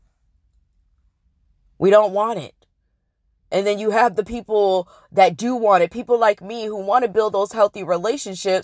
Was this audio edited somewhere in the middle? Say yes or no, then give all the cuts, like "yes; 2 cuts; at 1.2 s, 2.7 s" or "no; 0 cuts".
no; 0 cuts